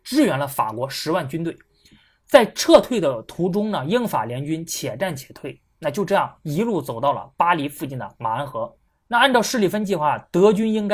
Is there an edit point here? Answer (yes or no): yes